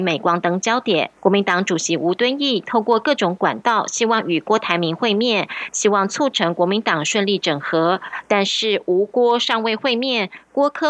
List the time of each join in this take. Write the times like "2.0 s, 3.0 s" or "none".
1.2 s